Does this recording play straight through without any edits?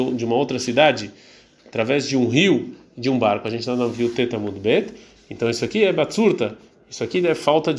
yes; 0 cuts

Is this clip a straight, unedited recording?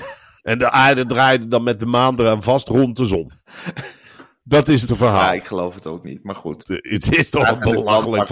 no; 1 cut; at 4.9 s

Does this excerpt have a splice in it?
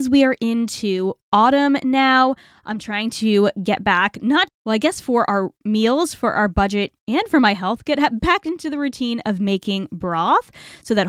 yes; 1 cut; at 4.5 s

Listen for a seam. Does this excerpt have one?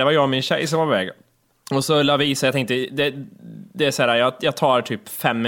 no; 0 cuts

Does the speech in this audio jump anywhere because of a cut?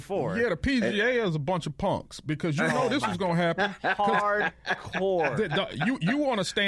no; 0 cuts

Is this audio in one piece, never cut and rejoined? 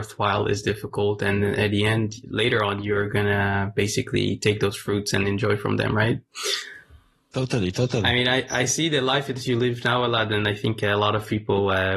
yes; 0 cuts

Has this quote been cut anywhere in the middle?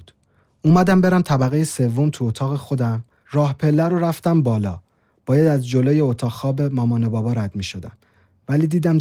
no; 0 cuts

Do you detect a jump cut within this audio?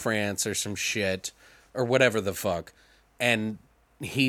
no; 0 cuts

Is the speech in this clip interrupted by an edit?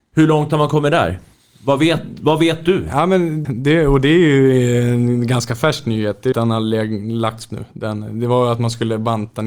yes; 3 cuts; at 3.4 s, 6.3 s, 7.5 s

